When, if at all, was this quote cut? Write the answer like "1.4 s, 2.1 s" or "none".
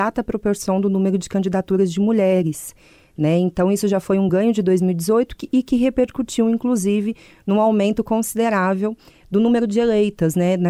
none